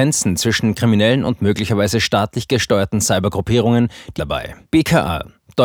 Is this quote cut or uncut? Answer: cut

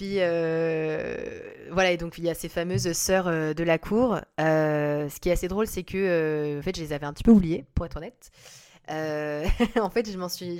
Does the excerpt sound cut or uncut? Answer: uncut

